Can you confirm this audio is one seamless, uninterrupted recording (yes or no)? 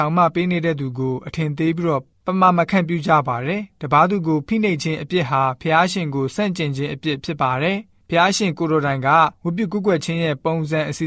no